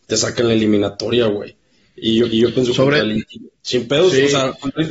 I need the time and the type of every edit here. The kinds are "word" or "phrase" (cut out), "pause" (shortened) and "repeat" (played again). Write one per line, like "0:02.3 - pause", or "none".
0:02.3 - repeat
0:03.5 - pause